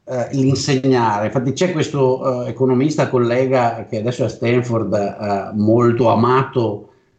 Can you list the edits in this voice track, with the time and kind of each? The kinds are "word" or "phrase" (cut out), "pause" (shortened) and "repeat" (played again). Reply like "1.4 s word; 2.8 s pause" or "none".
none